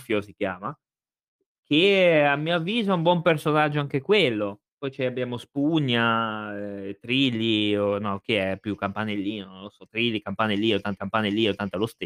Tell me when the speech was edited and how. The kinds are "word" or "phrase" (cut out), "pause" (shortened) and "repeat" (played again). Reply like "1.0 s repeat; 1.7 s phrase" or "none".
4.7 s pause; 11.0 s repeat